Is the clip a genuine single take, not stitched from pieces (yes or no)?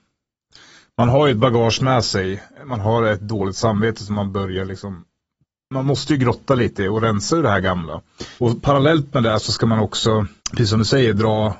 no